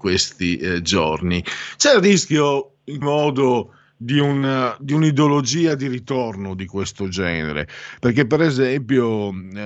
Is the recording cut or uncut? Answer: cut